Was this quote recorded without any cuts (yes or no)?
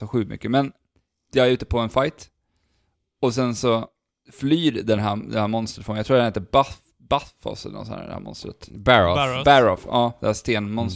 yes